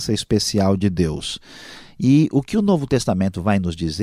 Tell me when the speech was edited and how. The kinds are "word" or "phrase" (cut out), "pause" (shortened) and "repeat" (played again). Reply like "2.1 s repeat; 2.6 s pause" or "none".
none